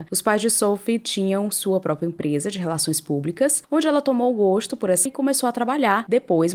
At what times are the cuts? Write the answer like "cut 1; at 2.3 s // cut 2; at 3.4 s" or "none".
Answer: cut 1; at 5.1 s